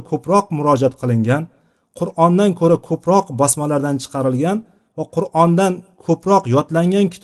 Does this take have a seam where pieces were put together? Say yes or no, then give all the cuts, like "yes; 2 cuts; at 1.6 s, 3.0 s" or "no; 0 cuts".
no; 0 cuts